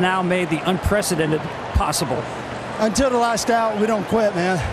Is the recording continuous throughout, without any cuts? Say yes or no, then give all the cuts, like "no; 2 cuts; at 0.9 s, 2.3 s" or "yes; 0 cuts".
yes; 0 cuts